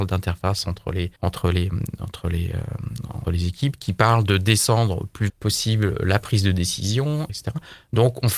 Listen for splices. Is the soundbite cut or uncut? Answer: cut